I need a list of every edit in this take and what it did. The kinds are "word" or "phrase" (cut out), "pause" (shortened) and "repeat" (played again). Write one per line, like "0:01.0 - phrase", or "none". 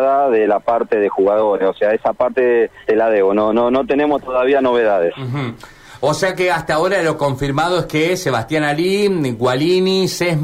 0:02.8 - pause